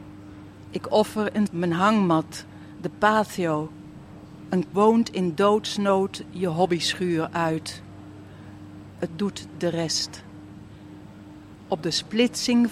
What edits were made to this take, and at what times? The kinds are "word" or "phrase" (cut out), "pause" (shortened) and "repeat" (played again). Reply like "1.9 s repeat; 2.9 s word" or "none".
1.5 s word; 4.7 s word; 9.1 s word